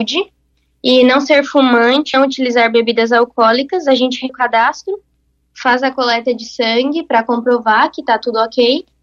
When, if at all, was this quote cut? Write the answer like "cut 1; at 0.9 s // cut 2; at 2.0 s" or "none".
cut 1; at 2.1 s // cut 2; at 4.3 s